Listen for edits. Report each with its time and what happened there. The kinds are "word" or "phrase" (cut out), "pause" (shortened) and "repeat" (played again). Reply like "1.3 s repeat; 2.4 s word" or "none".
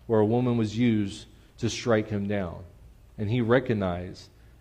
none